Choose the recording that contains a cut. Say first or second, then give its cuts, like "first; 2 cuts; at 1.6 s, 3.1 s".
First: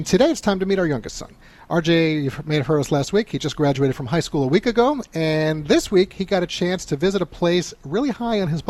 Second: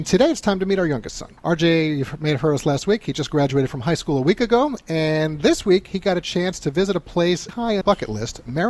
second; 3 cuts; at 1.4 s, 7.5 s, 7.8 s